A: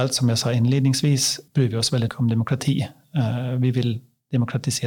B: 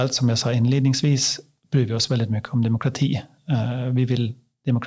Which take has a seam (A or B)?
A